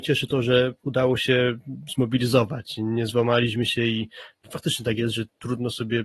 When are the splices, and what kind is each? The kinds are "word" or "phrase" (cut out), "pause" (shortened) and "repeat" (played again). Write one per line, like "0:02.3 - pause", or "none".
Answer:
none